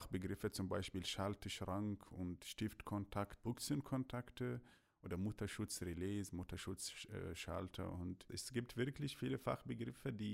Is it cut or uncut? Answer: uncut